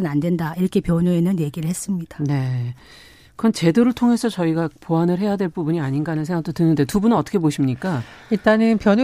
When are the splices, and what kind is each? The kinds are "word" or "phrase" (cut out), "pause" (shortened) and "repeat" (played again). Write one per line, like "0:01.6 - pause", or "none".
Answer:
none